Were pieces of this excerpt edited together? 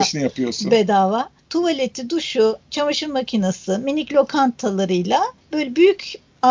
no; 0 cuts

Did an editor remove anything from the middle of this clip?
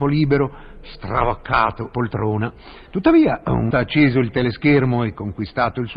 yes; 3 cuts; at 1.9 s, 2.9 s, 3.7 s

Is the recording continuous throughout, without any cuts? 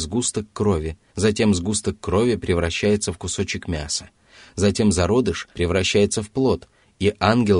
no; 2 cuts; at 1.1 s, 5.5 s

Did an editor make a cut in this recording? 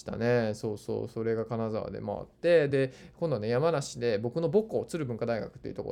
no; 0 cuts

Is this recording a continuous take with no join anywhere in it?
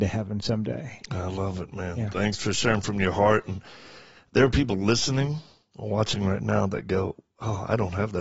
yes; 0 cuts

